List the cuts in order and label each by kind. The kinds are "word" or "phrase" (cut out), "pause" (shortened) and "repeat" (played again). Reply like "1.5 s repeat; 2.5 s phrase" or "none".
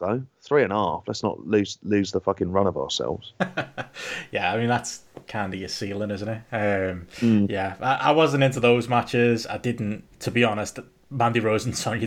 10.1 s pause